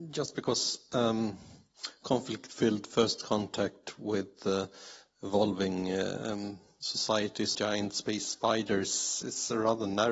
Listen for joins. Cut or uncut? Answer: cut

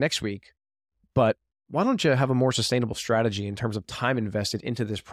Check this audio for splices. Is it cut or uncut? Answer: uncut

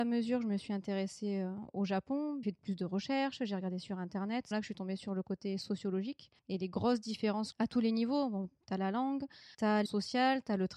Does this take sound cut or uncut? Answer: cut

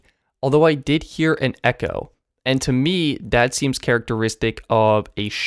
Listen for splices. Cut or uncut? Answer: uncut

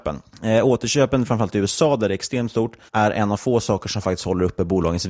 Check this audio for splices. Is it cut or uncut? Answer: cut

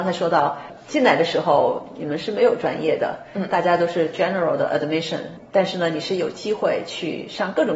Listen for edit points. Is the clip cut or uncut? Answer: uncut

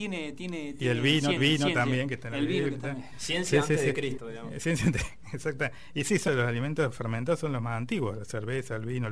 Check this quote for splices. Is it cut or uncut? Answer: cut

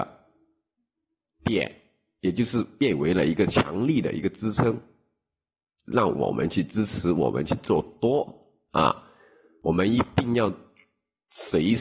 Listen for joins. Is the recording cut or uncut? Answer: uncut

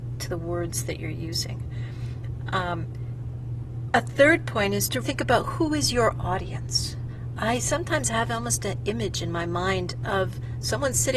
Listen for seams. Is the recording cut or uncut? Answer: cut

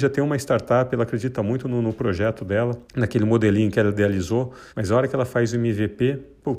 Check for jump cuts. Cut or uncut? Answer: cut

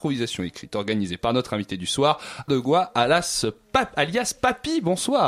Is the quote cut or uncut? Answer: cut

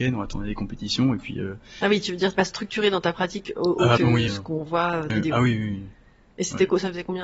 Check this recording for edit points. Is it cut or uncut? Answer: cut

